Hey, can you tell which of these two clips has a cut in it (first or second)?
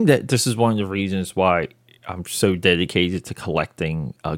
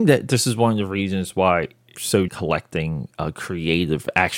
second